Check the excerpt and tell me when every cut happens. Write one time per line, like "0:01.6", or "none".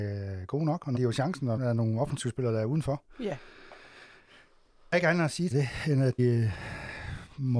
0:01.0
0:01.6
0:04.9
0:05.5
0:06.2